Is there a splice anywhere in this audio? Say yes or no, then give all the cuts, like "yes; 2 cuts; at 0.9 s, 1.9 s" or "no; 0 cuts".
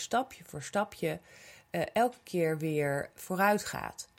no; 0 cuts